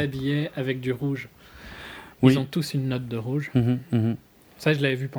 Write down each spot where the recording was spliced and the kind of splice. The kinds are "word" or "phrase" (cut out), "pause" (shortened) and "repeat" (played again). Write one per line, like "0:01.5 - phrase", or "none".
none